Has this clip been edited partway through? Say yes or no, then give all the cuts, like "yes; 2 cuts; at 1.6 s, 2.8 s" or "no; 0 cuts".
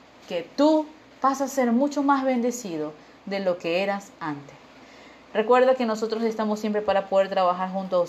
no; 0 cuts